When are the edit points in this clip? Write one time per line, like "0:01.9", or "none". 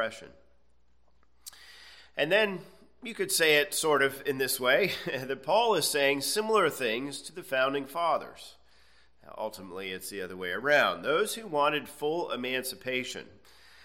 none